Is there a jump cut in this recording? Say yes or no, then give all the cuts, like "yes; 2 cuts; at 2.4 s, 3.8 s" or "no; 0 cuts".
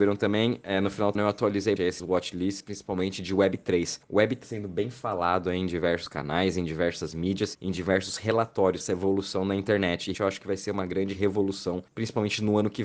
yes; 5 cuts; at 1.2 s, 1.8 s, 4.4 s, 8.8 s, 10.1 s